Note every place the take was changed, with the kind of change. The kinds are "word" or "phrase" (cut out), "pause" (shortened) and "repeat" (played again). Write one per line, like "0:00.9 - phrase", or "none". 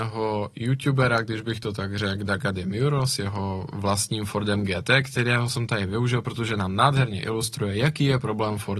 none

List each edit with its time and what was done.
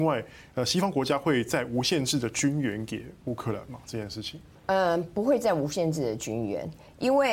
0:04.5 - pause

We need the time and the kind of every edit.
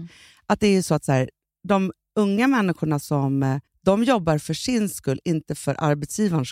0:03.7 - pause

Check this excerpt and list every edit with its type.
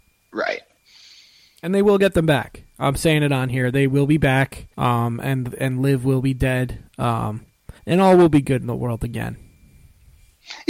0:04.7 - pause
0:07.8 - pause

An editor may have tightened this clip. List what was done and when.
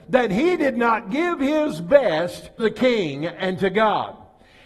0:02.6 - word

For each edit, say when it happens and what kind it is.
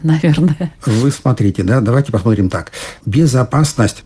none

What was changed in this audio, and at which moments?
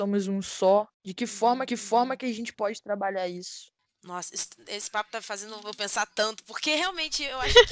0:00.9 - pause
0:01.7 - repeat
0:03.9 - pause

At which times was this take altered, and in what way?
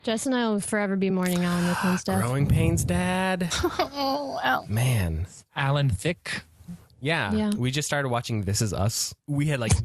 none

